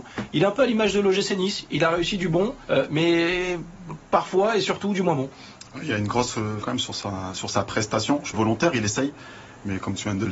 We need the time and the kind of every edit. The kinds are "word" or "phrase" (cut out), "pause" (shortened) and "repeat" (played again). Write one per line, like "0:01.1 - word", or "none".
0:02.6 - pause
0:06.6 - word
0:08.3 - phrase